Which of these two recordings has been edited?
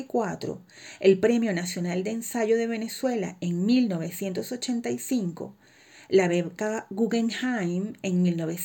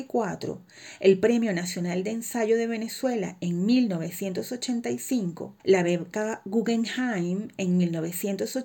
second; 1 cut; at 5.6 s

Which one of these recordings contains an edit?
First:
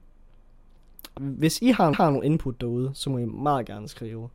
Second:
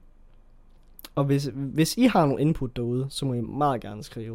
first; 2 cuts; at 1.2 s, 1.9 s

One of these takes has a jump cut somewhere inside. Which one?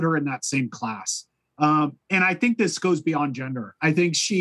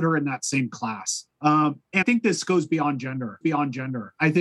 second; 3 cuts; at 1.3 s, 2.0 s, 3.4 s

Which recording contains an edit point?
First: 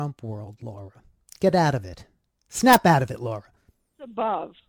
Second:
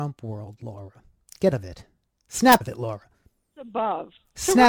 second; 2 cuts; at 1.5 s, 2.6 s

